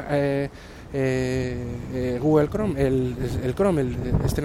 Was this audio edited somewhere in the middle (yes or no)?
no